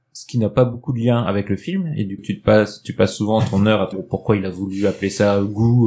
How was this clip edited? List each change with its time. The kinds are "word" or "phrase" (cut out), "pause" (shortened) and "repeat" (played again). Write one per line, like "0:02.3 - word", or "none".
0:02.2 - word
0:03.9 - word